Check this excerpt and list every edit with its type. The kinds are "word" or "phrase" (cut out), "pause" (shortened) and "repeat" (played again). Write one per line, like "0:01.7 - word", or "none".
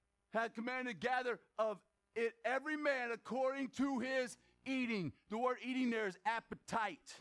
0:01.5 - word